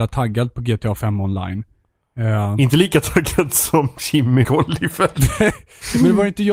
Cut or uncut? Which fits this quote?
cut